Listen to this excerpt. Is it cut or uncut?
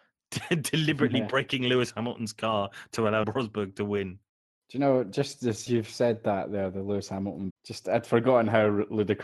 cut